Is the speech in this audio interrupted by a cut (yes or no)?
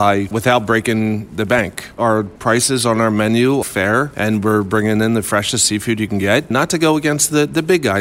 yes